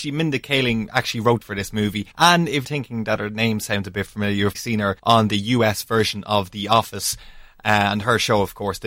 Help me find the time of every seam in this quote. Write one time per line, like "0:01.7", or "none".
0:01.4
0:02.1
0:02.6
0:04.5
0:05.0